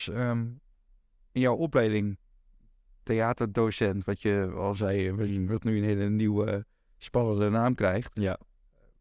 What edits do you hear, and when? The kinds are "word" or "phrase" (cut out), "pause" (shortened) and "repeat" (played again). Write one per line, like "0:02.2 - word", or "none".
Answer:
none